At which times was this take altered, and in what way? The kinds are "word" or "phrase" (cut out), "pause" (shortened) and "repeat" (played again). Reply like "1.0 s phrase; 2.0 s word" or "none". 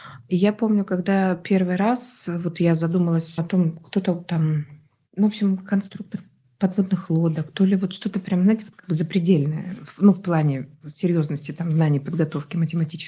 3.4 s word